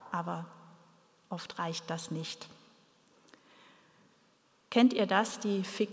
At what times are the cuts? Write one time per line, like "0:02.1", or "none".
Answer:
none